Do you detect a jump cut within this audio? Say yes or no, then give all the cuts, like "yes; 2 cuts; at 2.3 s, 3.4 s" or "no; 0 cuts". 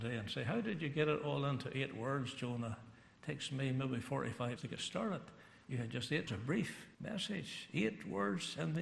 yes; 3 cuts; at 4.6 s, 6.3 s, 6.9 s